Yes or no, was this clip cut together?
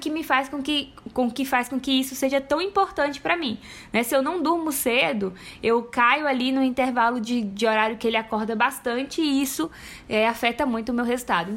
no